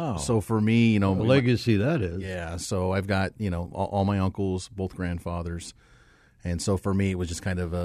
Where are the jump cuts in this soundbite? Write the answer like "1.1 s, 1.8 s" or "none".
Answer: none